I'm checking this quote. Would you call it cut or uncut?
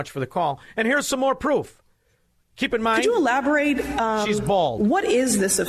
uncut